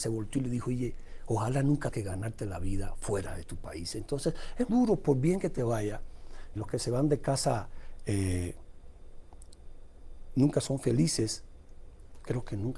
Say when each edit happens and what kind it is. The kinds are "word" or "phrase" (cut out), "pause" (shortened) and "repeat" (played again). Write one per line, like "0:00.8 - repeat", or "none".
0:01.9 - word
0:04.7 - word
0:06.6 - word